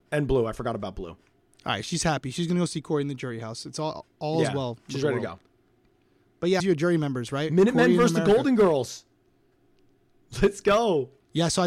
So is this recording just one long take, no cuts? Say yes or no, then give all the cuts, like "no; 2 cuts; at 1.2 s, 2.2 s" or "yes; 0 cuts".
no; 1 cut; at 6.6 s